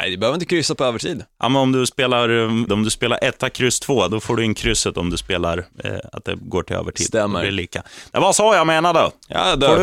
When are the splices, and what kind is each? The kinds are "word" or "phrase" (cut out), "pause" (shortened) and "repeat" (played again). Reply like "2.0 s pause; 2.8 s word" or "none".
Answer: 2.7 s word; 4.1 s word